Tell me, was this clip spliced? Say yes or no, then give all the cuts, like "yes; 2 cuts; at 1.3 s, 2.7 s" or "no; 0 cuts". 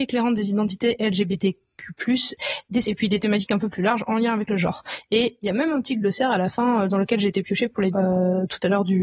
yes; 2 cuts; at 2.8 s, 7.9 s